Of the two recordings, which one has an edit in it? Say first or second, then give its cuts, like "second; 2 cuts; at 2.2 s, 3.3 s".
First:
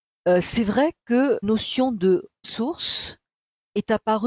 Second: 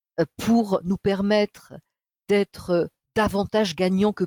first; 2 cuts; at 1.4 s, 2.4 s